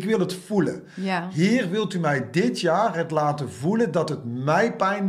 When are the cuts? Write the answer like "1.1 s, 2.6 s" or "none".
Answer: none